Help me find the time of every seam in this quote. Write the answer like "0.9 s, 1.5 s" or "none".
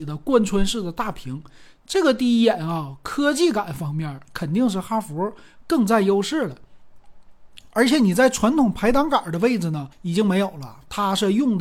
9.9 s